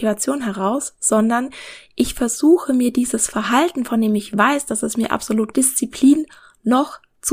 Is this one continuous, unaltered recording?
no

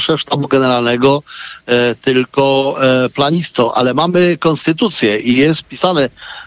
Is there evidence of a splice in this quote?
no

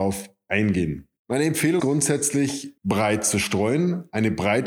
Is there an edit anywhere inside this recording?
yes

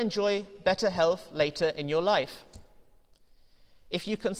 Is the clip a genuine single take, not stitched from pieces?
yes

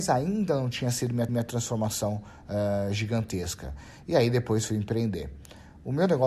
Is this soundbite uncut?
no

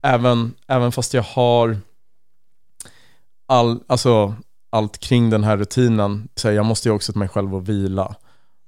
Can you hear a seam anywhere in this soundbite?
yes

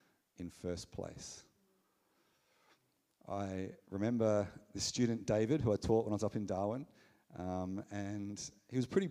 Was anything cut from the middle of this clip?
no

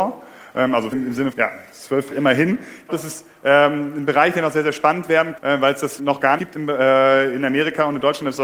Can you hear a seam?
yes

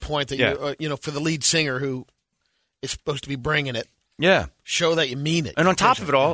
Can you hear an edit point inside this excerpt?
no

